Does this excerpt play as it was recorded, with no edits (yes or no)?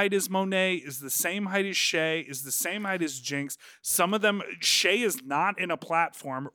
yes